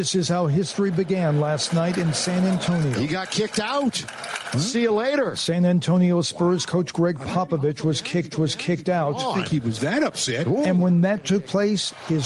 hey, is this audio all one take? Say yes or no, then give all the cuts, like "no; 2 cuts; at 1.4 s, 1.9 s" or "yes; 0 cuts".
no; 1 cut; at 8.3 s